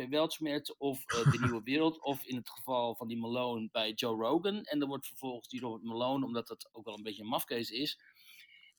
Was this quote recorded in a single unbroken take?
yes; 0 cuts

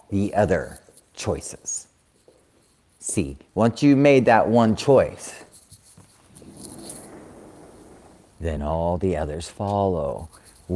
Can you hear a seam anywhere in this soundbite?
no; 0 cuts

